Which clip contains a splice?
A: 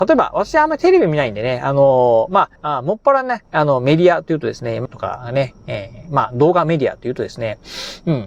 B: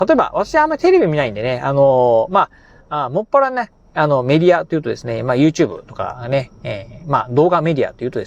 A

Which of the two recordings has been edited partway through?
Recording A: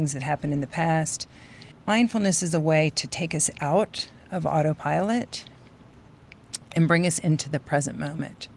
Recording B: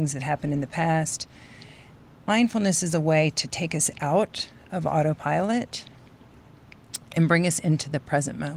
A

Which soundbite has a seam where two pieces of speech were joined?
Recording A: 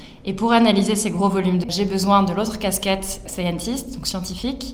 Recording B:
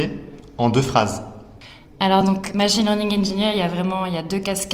A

